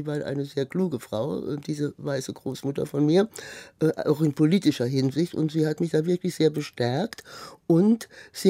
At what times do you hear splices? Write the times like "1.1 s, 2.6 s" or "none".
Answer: none